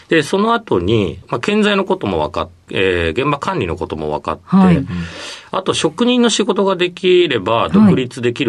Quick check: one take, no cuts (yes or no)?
no